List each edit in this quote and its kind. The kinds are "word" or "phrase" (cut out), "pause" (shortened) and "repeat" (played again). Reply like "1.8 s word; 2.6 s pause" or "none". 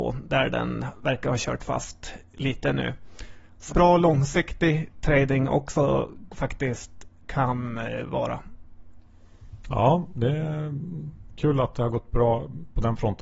3.7 s phrase